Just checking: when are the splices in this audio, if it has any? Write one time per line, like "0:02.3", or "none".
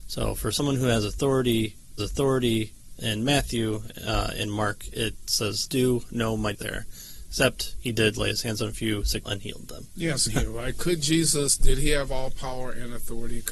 0:02.0
0:05.7
0:06.5
0:09.3
0:10.3